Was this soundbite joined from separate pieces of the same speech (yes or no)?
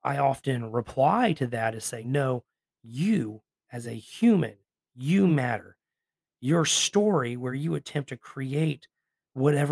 no